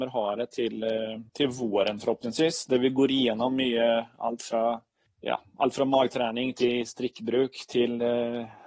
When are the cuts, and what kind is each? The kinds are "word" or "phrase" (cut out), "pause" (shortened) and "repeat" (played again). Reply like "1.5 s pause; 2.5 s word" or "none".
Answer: 1.3 s pause; 5.1 s pause